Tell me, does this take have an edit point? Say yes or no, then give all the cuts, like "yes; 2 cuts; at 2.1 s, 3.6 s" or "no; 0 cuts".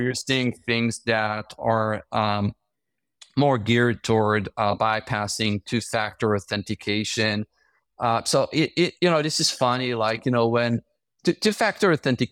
no; 0 cuts